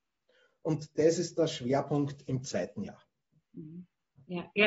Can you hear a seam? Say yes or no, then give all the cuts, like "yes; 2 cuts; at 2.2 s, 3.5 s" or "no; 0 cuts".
no; 0 cuts